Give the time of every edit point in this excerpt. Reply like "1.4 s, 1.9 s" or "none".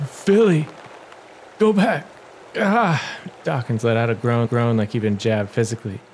4.4 s